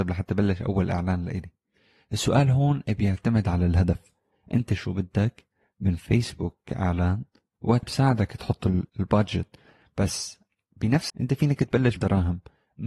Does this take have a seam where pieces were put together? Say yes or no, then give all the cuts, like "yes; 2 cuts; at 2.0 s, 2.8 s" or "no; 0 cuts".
yes; 4 cuts; at 7.8 s, 8.9 s, 11.1 s, 12.0 s